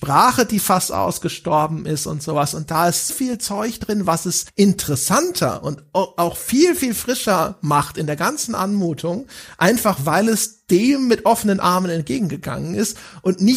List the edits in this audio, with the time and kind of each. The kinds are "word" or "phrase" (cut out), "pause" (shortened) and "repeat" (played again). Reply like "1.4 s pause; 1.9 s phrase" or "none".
3.1 s word; 4.5 s pause